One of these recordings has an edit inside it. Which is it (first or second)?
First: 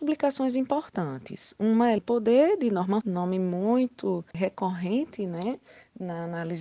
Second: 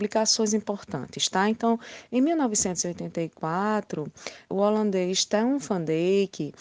first